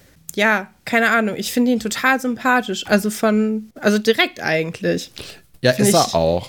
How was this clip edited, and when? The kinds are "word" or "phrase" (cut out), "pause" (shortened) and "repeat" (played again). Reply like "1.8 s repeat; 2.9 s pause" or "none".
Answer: 3.7 s pause